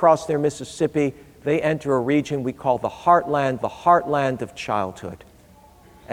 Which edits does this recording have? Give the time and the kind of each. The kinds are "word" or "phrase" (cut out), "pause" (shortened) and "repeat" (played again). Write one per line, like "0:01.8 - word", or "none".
0:03.6 - repeat